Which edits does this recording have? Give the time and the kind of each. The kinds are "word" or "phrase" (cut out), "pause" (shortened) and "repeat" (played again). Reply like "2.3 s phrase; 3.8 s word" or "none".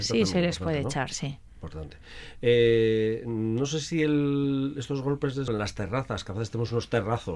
5.5 s word